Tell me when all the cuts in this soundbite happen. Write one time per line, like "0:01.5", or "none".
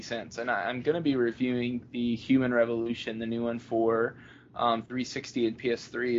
none